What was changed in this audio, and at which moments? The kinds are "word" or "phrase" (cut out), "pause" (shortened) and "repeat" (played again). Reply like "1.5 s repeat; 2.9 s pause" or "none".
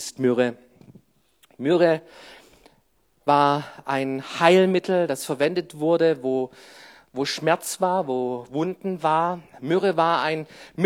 none